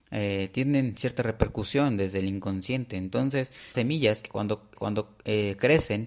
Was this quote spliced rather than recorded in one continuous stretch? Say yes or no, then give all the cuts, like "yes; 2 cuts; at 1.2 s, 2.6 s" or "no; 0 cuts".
yes; 2 cuts; at 3.7 s, 4.8 s